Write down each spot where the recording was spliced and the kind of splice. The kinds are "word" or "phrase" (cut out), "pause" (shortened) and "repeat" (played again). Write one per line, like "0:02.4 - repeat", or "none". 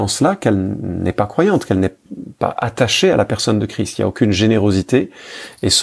none